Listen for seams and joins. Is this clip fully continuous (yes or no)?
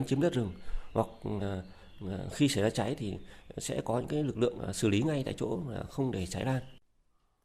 yes